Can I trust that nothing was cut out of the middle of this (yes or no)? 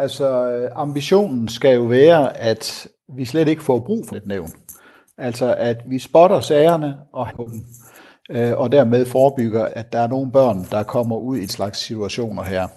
no